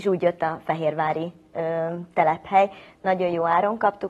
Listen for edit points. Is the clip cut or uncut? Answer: uncut